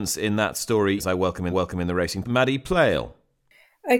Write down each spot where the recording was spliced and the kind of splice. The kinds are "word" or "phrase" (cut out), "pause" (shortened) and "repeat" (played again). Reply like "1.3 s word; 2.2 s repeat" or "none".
1.0 s word; 1.5 s repeat; 2.2 s word